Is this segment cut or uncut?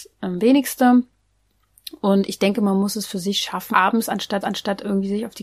cut